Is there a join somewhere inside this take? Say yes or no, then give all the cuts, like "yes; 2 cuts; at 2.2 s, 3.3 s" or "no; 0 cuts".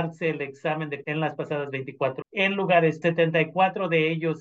yes; 3 cuts; at 1.0 s, 2.2 s, 3.0 s